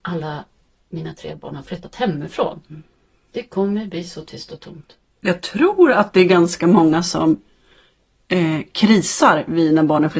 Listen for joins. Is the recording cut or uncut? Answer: uncut